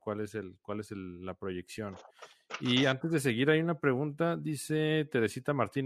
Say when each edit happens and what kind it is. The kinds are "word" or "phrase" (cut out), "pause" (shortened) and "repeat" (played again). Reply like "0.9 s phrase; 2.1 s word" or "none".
none